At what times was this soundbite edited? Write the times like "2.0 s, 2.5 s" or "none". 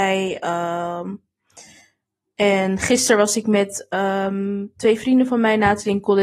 none